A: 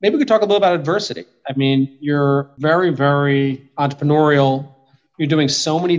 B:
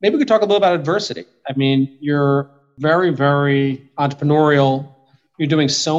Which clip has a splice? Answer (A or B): A